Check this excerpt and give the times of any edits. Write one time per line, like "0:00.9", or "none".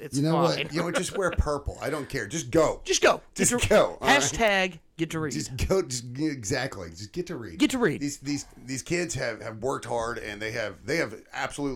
none